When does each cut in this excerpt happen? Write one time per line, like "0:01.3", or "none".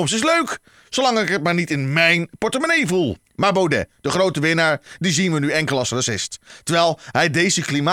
0:03.2